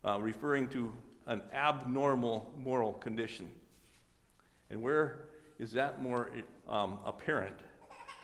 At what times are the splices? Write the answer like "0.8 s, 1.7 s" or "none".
none